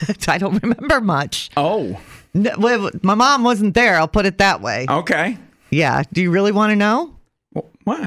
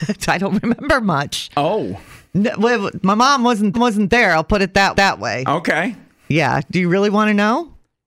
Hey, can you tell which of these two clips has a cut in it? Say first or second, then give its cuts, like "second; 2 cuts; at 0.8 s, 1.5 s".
second; 2 cuts; at 3.7 s, 4.9 s